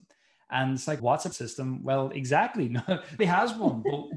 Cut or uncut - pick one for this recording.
cut